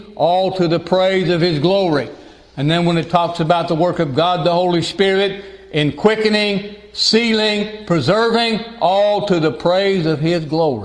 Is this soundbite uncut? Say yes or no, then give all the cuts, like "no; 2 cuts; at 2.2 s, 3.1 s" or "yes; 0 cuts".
yes; 0 cuts